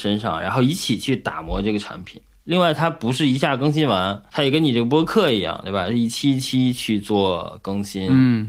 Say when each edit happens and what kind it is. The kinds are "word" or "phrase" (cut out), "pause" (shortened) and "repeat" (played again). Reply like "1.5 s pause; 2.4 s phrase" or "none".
4.3 s word